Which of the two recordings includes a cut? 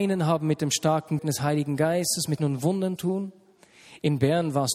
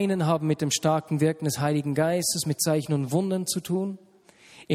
first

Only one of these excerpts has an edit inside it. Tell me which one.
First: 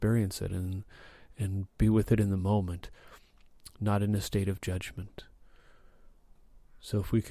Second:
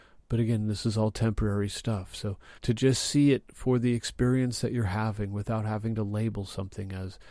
second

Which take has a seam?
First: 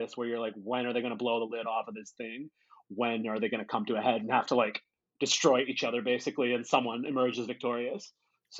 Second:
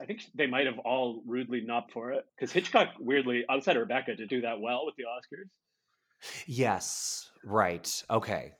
second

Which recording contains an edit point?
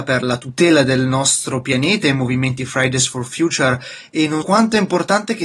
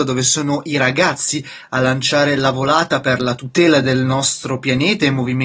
first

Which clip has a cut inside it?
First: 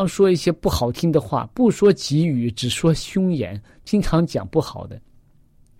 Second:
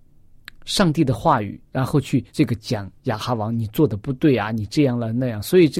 second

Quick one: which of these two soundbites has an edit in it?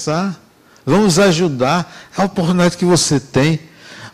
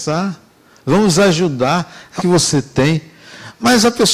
second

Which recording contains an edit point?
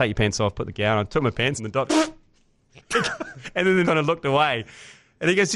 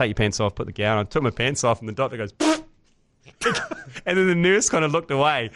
first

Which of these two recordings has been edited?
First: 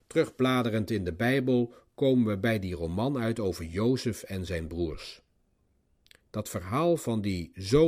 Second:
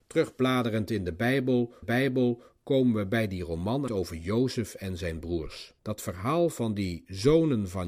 second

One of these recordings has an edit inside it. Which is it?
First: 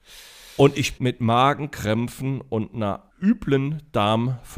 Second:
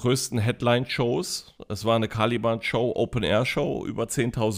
first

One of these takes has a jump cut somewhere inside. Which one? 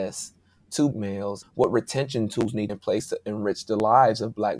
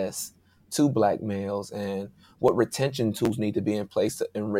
first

